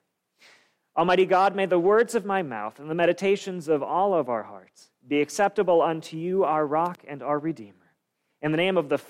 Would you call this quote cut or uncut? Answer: uncut